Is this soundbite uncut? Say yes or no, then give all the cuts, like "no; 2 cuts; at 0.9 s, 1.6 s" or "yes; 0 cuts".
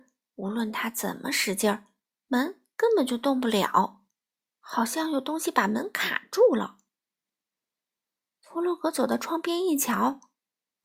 yes; 0 cuts